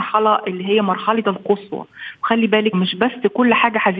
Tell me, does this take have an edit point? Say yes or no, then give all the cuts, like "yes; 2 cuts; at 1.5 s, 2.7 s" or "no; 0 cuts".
yes; 2 cuts; at 1.2 s, 2.7 s